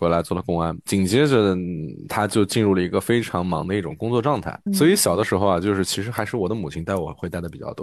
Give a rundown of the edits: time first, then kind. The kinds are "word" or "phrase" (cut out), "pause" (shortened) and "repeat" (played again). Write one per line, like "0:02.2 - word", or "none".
0:04.7 - word